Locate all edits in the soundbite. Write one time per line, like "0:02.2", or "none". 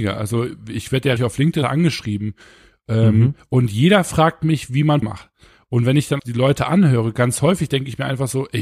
0:01.2
0:01.6
0:05.0
0:06.2